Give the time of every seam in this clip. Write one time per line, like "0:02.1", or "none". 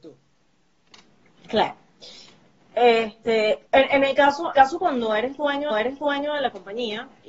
0:03.7
0:04.5
0:05.7